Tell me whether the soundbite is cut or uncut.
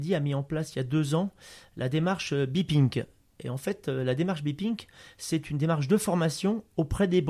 uncut